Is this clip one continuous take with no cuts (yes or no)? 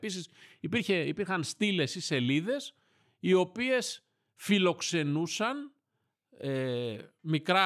yes